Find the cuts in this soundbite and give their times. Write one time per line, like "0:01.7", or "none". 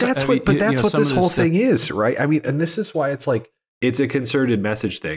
none